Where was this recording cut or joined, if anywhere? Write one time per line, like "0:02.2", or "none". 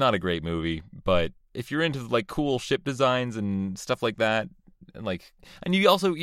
0:01.4